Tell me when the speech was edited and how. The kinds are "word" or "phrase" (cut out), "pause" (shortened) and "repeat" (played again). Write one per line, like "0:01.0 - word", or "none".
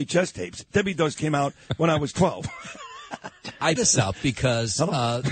0:01.2 - word
0:03.2 - word
0:03.8 - word